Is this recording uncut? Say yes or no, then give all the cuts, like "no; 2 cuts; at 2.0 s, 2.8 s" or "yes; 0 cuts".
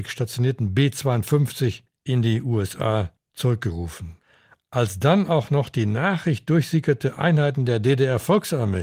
yes; 0 cuts